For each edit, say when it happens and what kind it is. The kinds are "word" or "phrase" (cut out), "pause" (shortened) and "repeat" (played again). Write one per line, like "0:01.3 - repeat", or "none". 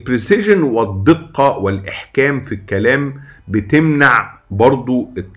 none